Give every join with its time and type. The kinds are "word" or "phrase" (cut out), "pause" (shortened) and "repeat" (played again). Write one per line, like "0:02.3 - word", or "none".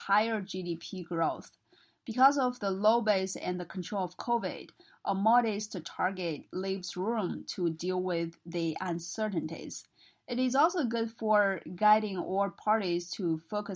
none